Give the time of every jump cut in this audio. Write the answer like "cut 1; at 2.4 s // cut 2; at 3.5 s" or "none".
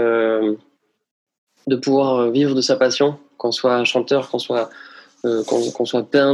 none